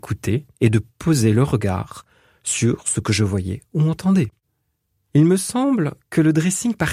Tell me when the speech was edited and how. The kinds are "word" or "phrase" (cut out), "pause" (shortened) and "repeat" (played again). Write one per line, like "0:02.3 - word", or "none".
none

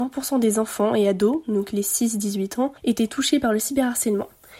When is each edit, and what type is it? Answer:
0:02.8 - pause

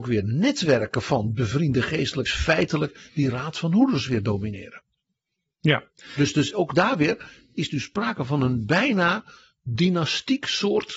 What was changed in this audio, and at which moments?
0:02.3 - phrase

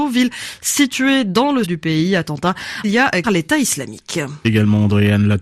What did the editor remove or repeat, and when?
0:01.6 - word
0:02.8 - word
0:03.2 - phrase
0:04.4 - phrase

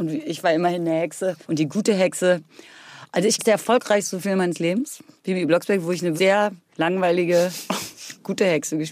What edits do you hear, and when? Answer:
0:01.4 - pause
0:03.4 - word
0:06.2 - word

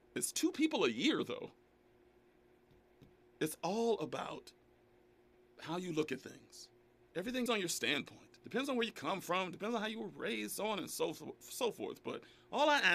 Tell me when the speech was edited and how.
0:03.2 - pause
0:05.4 - word
0:07.5 - phrase
0:08.4 - pause

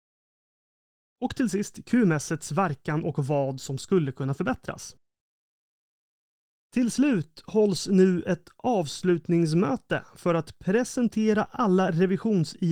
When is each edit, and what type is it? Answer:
none

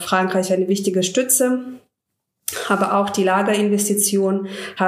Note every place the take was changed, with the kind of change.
none

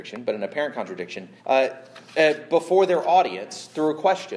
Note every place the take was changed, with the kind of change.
0:01.4 - pause

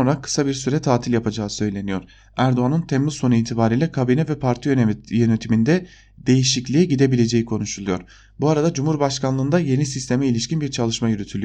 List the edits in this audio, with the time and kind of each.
none

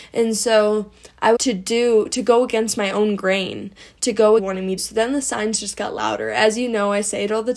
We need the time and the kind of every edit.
0:01.4 - phrase
0:04.4 - phrase
0:04.8 - word

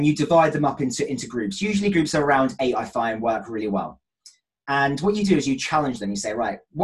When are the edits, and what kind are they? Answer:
none

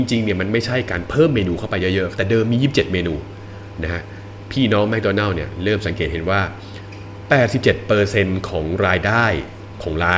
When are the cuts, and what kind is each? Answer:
0:02.1 - phrase

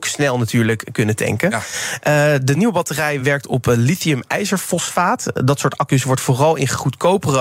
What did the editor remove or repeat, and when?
none

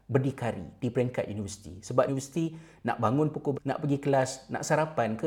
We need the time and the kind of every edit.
0:02.1 - word
0:03.5 - word

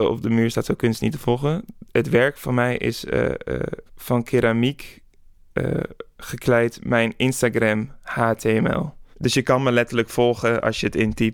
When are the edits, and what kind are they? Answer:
0:03.9 - pause
0:09.1 - pause

